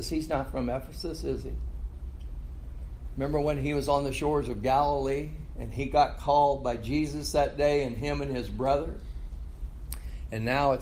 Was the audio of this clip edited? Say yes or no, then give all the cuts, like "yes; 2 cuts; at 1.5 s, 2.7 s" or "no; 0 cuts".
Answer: no; 0 cuts